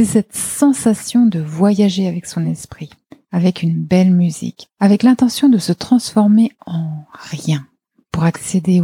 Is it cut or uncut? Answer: uncut